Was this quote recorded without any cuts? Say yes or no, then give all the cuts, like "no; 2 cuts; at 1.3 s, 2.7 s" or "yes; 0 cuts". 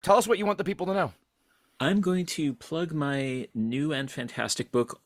yes; 0 cuts